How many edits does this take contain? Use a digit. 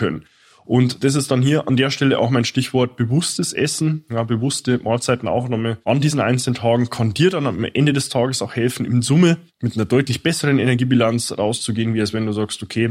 2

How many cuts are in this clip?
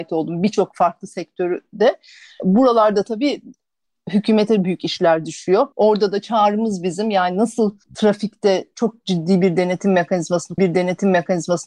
3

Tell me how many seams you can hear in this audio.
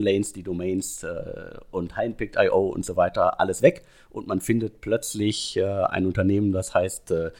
0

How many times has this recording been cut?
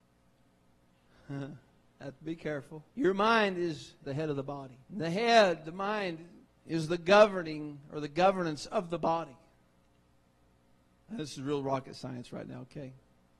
4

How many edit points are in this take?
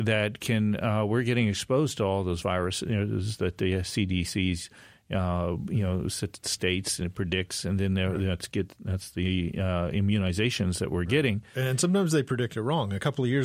0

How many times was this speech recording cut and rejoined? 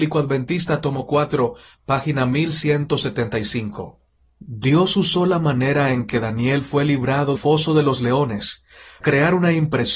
2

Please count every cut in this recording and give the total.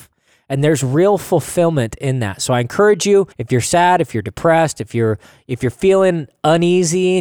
1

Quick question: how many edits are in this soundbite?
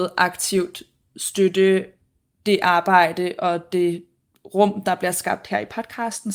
0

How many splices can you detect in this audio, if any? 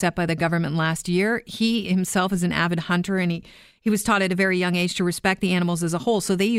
0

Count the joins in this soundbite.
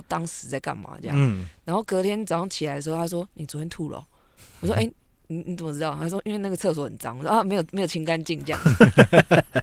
0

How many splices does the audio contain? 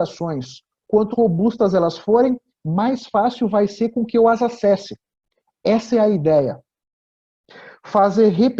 1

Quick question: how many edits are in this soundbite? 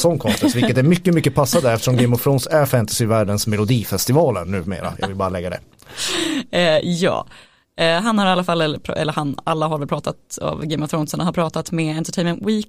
0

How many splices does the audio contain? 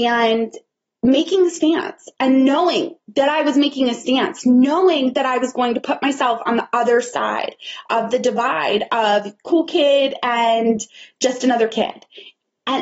0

